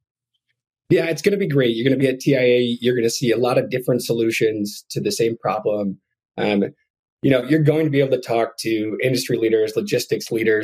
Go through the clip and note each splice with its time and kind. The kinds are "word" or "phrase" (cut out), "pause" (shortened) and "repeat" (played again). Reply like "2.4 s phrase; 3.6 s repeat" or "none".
none